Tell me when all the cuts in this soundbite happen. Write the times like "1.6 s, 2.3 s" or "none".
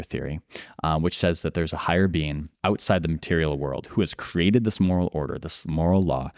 2.5 s